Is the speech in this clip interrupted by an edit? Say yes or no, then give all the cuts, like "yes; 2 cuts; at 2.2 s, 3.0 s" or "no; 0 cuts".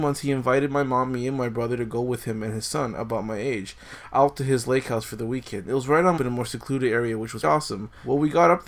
yes; 2 cuts; at 6.2 s, 7.4 s